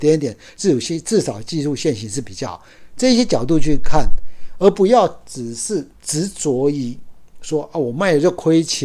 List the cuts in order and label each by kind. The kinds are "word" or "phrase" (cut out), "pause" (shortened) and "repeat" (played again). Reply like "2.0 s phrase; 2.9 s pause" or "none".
5.9 s pause